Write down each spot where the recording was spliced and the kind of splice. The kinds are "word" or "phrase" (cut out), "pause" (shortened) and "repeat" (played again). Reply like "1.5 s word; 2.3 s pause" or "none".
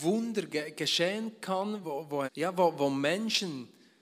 1.8 s word; 2.3 s word

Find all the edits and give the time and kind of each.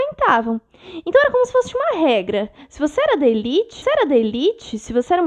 3.8 s repeat

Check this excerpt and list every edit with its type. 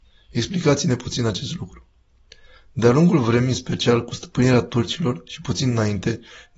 none

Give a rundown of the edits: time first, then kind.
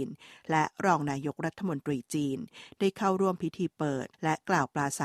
4.1 s pause

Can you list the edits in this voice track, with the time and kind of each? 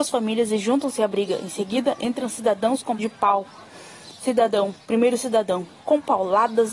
3.0 s word

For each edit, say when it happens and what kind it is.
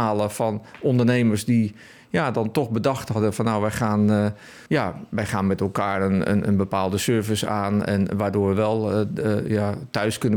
4.7 s pause

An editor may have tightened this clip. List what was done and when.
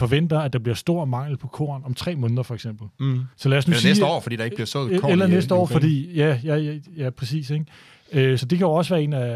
3.3 s pause; 8.4 s phrase

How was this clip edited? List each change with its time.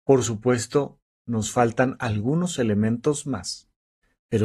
none

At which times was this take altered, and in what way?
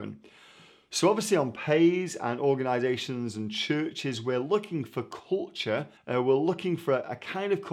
6.0 s pause

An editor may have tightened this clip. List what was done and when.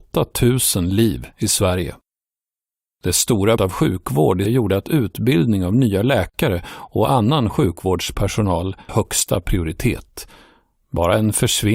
3.6 s word; 4.5 s word; 8.9 s word

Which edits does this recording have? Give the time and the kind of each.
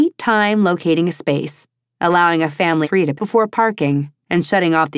2.8 s word; 3.2 s word

